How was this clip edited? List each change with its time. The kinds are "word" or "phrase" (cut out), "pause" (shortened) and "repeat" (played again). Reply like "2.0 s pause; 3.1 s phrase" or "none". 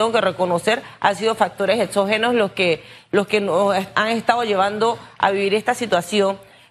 none